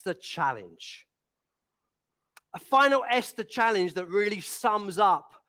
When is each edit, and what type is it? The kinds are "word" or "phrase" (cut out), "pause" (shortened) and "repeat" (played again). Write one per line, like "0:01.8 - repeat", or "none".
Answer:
none

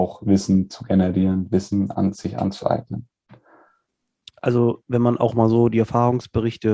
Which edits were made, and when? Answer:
none

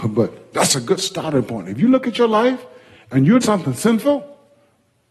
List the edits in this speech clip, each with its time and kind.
0:03.4 - word

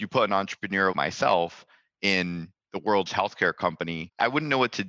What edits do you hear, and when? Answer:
0:00.9 - word
0:03.1 - word

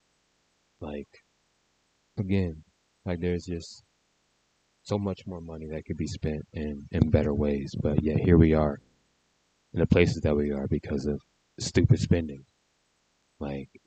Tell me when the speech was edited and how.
none

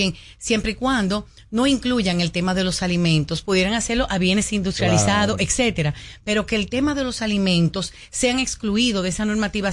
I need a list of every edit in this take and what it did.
none

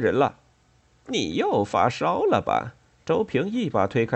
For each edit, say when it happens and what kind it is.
none

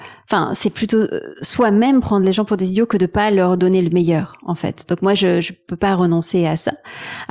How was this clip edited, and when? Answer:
none

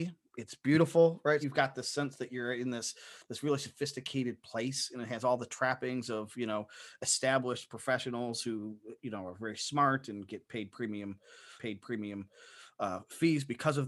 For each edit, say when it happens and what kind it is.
0:01.4 - phrase
0:11.6 - repeat

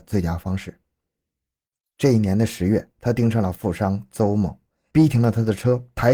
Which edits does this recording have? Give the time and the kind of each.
none

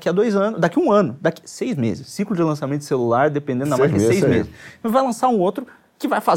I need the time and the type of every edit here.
none

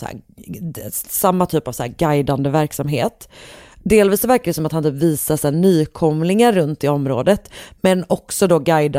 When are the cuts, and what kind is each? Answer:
none

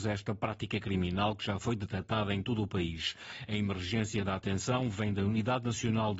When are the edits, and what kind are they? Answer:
none

